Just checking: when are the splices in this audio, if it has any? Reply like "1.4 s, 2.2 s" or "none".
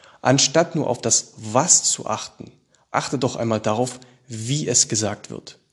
none